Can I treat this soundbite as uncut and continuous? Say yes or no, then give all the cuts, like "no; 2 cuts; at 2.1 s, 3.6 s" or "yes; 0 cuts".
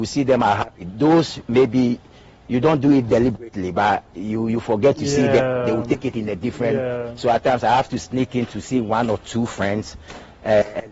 yes; 0 cuts